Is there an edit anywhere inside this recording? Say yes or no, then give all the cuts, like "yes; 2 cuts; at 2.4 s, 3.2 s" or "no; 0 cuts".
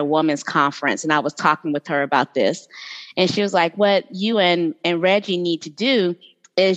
no; 0 cuts